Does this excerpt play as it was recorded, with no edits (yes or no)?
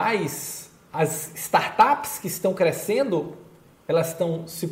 yes